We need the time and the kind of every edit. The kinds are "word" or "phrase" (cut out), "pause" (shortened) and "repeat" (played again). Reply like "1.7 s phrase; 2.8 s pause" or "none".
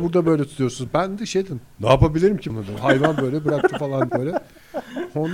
2.5 s word; 4.1 s word